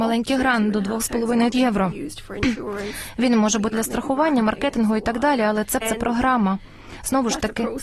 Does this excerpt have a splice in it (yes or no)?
yes